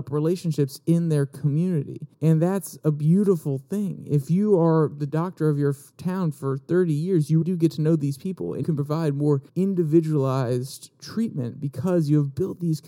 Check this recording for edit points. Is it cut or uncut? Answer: cut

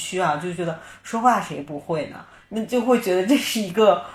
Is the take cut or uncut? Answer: uncut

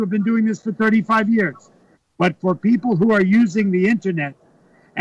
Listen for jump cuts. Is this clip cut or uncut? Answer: uncut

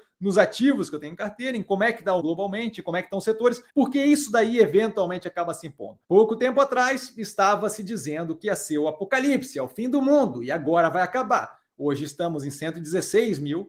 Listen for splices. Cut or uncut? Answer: cut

